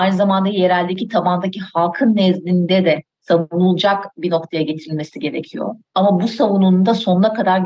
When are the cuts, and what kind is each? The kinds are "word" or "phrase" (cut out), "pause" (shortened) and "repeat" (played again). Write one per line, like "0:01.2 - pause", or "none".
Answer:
0:05.8 - pause